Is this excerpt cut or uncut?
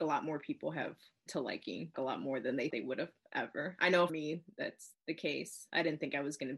cut